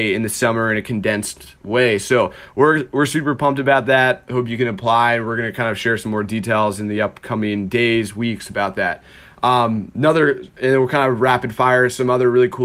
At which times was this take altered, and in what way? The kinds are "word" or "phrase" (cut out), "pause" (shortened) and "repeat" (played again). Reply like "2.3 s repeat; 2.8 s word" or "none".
none